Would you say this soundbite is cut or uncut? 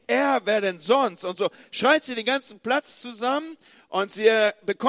uncut